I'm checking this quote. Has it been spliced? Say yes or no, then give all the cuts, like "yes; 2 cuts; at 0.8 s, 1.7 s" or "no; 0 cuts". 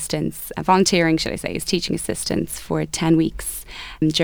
no; 0 cuts